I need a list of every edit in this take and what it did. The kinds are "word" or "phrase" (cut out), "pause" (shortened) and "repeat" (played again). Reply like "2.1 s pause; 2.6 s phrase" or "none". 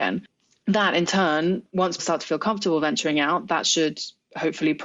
2.0 s word